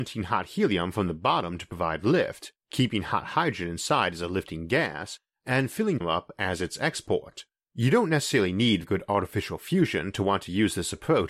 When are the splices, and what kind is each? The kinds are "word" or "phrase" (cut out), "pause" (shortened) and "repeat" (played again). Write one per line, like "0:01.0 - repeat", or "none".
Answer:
0:06.0 - phrase
0:07.5 - pause
0:08.8 - word